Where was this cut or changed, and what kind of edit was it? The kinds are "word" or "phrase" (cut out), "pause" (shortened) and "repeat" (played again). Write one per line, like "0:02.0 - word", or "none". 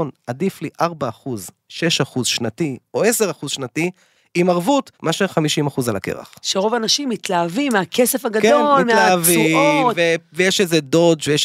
0:04.9 - pause